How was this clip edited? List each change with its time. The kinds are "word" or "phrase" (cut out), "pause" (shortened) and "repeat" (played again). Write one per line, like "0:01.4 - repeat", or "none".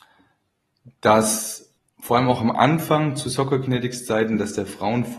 0:01.8 - pause